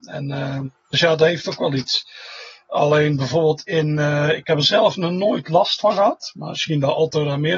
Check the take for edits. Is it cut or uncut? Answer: uncut